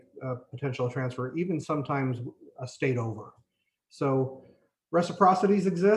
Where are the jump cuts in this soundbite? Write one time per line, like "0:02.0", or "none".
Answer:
none